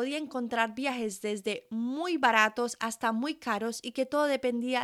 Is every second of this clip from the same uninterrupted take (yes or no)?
yes